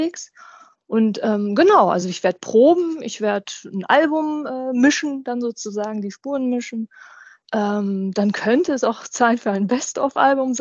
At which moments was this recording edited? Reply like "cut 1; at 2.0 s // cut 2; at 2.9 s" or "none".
none